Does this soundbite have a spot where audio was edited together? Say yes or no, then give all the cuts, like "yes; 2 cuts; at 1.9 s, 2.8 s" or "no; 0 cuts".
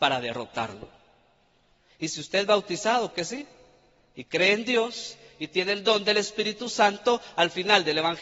yes; 1 cut; at 3.1 s